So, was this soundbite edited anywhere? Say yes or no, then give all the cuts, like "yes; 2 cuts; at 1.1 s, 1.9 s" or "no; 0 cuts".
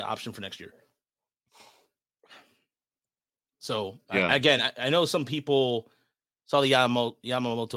no; 0 cuts